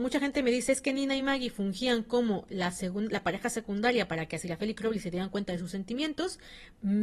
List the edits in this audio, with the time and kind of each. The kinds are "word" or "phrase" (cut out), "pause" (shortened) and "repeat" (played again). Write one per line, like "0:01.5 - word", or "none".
none

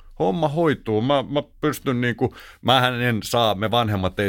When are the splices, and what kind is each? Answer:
none

